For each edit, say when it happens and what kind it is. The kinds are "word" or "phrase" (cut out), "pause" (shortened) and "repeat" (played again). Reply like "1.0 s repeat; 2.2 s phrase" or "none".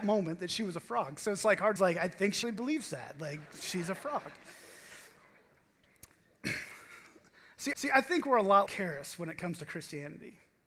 1.8 s phrase; 2.4 s word; 7.7 s repeat; 8.7 s word